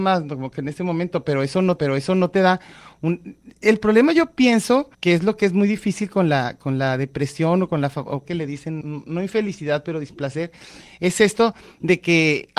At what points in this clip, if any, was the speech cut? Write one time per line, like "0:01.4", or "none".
0:01.8
0:04.9
0:08.2
0:08.8